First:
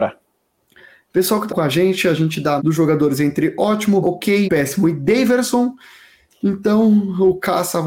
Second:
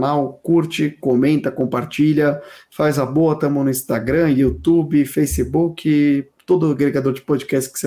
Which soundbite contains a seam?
first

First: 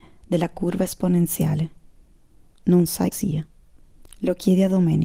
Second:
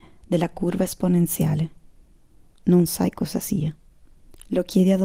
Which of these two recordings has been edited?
first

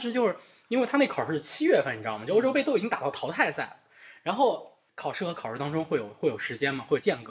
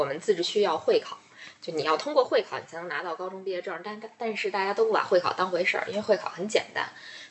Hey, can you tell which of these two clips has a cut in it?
first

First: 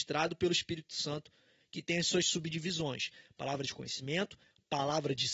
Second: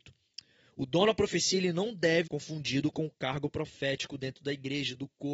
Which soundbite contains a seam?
second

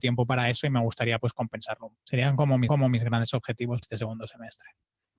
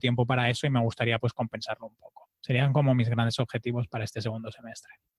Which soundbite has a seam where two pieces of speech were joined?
first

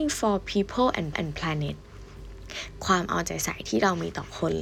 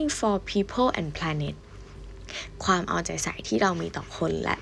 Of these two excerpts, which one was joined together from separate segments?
first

